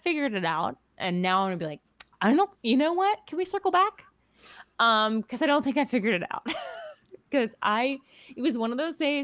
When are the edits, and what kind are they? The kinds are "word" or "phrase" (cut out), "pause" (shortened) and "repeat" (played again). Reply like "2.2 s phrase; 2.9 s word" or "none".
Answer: 2.5 s pause

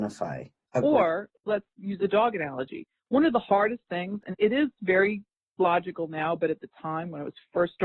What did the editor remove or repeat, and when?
none

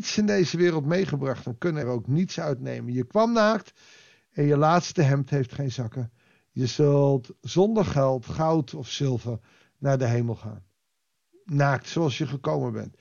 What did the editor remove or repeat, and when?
1.8 s word

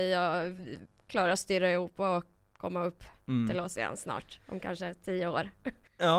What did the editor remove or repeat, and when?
none

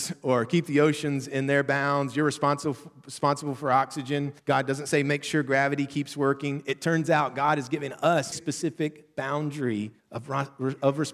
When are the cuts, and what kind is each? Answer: 4.4 s pause; 8.3 s word; 10.0 s pause

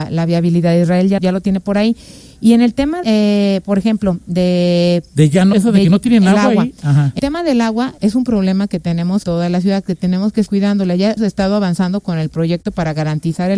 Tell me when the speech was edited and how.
1.2 s word; 3.0 s word; 5.5 s word; 7.2 s word; 8.0 s word; 9.2 s word; 10.5 s word; 11.2 s word

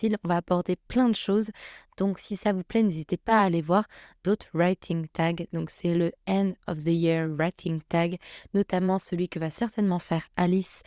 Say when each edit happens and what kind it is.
none

